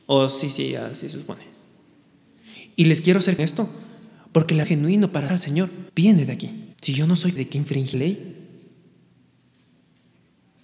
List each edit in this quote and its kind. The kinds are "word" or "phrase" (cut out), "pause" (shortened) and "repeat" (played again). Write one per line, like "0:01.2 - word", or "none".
0:03.4 - phrase
0:04.6 - word
0:05.3 - word
0:05.9 - pause
0:06.7 - pause
0:07.4 - word
0:07.9 - word